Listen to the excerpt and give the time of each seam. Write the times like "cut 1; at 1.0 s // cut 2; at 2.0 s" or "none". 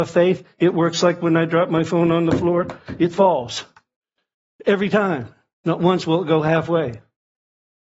none